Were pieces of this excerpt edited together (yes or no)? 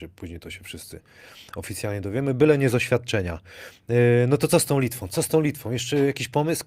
no